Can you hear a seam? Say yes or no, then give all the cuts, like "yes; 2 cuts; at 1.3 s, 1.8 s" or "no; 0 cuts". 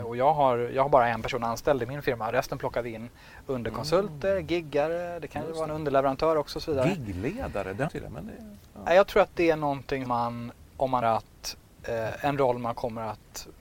yes; 3 cuts; at 7.9 s, 10.1 s, 11.0 s